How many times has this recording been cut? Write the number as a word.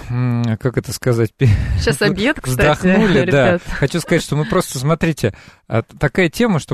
zero